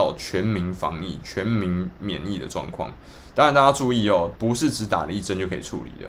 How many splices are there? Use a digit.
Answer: 1